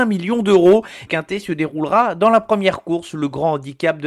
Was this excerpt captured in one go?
no; 1 cut; at 1.1 s

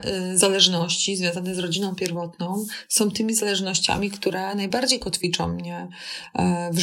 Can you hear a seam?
no; 0 cuts

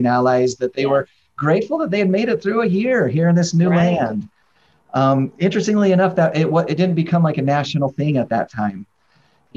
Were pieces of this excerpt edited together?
no; 0 cuts

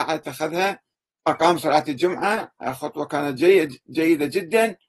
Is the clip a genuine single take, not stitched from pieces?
no; 1 cut; at 0.9 s

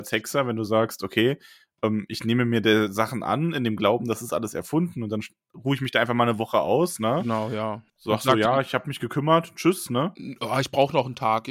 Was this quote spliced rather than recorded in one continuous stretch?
yes; 1 cut; at 7.9 s

